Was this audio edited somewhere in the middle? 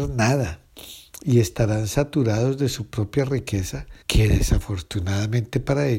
yes; 1 cut; at 4.0 s

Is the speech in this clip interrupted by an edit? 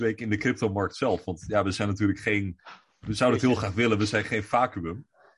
no; 0 cuts

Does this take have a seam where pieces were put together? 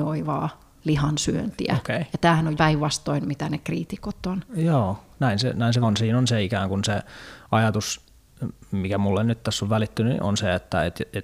yes; 2 cuts; at 2.6 s, 5.8 s

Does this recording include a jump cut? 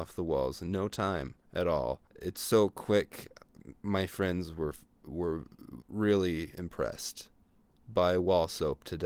yes; 2 cuts; at 2.1 s, 5.8 s

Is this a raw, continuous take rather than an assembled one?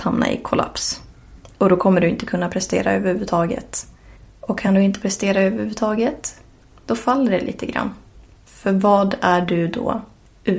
yes; 0 cuts

